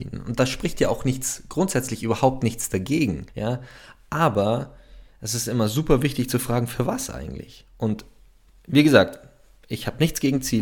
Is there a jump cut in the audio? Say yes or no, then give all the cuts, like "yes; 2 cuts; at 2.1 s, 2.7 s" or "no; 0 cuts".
yes; 1 cut; at 3.3 s